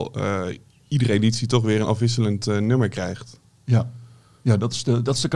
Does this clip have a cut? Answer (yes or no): no